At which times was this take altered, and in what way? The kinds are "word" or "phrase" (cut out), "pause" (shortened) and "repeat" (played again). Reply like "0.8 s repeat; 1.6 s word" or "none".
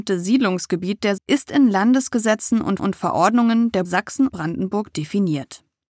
1.2 s word; 2.8 s repeat; 3.8 s word; 4.3 s word

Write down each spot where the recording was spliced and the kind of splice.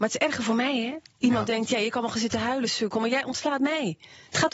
none

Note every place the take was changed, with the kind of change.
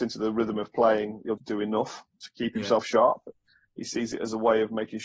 1.4 s word

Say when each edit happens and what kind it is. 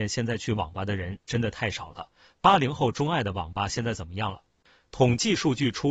none

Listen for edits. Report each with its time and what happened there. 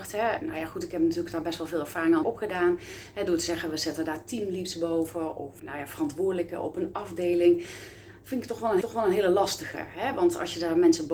2.2 s word; 5.6 s word; 8.8 s repeat

